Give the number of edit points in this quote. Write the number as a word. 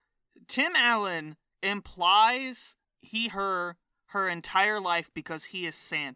two